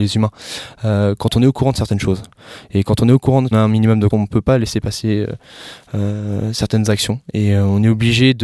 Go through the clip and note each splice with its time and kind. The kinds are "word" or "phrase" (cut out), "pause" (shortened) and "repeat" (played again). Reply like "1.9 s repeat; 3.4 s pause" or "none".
3.5 s phrase; 4.1 s word